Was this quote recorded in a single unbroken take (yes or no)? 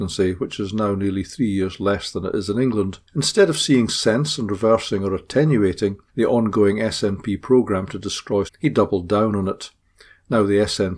no